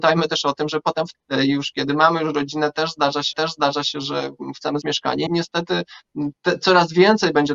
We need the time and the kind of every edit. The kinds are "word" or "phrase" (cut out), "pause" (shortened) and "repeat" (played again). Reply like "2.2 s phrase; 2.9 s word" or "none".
1.1 s word; 3.3 s repeat; 4.8 s word; 5.3 s phrase; 6.3 s word